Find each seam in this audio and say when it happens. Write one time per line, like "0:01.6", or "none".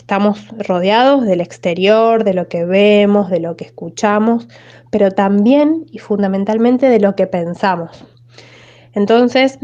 none